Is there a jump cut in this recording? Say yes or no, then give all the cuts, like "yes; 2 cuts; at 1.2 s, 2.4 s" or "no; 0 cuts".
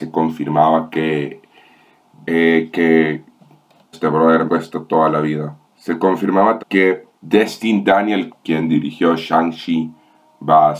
yes; 7 cuts; at 2.2 s, 3.9 s, 4.5 s, 5.6 s, 6.6 s, 7.1 s, 8.3 s